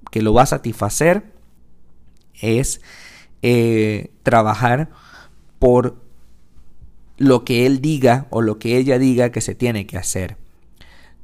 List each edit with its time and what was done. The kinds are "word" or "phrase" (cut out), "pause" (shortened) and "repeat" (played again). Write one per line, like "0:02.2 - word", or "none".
none

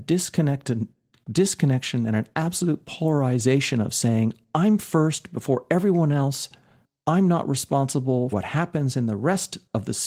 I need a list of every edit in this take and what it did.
0:08.3 - word

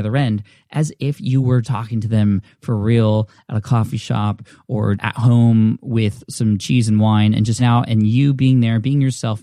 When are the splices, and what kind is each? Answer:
0:01.6 - word
0:04.9 - word
0:07.6 - word

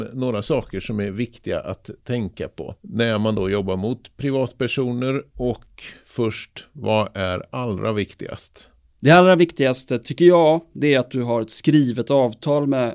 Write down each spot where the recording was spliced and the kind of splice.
none

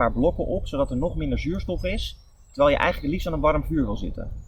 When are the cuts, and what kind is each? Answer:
none

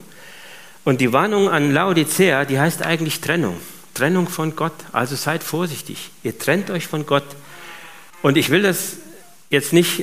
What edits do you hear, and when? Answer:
0:08.1 - pause

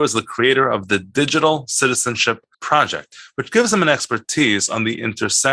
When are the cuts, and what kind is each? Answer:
0:02.5 - pause

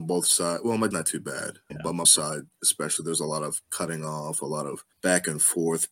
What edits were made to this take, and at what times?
0:00.9 - phrase
0:01.7 - word
0:02.0 - word
0:04.9 - pause

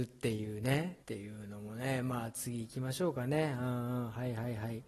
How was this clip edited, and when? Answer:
0:01.0 - pause

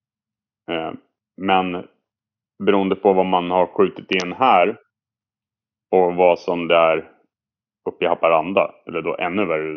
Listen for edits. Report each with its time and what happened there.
none

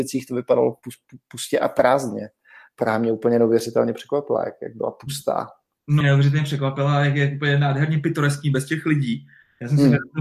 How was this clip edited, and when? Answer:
0:06.0 - word

